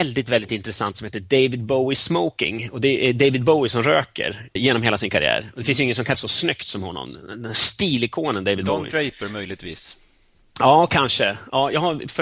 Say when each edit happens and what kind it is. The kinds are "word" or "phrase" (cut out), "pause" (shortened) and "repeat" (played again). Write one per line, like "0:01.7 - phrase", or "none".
0:04.6 - word
0:06.1 - word